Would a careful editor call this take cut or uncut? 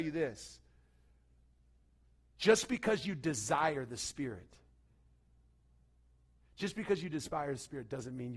uncut